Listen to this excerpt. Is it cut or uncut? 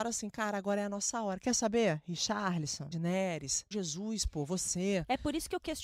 cut